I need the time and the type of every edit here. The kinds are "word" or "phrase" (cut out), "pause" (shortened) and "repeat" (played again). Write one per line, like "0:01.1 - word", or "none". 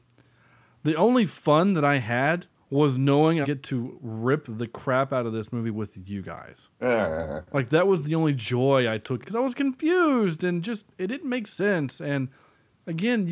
0:03.4 - phrase
0:09.2 - phrase
0:10.9 - pause